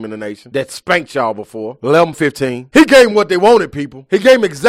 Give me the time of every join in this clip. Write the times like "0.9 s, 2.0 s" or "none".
2.1 s